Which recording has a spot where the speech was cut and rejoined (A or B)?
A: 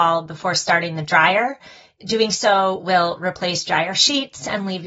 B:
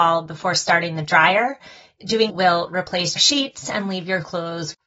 B